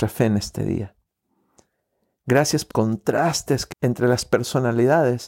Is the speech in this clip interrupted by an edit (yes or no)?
yes